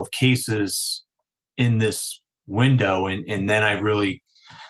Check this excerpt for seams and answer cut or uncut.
uncut